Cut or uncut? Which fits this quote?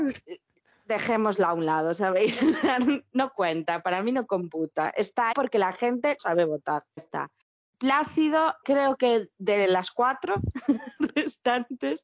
cut